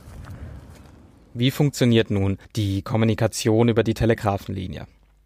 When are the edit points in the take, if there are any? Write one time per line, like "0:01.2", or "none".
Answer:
0:02.4